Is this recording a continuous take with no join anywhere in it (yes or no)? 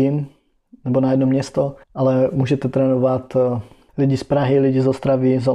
no